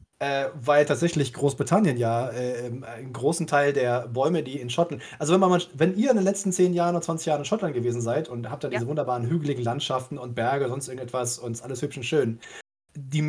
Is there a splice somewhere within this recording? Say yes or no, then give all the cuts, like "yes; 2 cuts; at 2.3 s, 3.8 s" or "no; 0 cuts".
no; 0 cuts